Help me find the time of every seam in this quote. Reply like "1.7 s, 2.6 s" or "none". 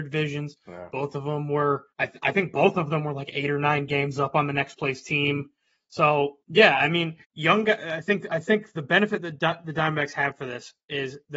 1.9 s, 6.4 s, 7.2 s